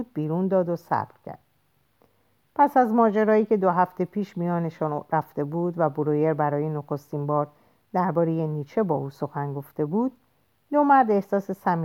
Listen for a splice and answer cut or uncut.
uncut